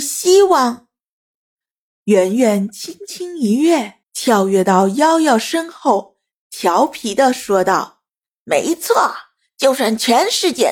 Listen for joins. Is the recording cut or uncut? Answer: cut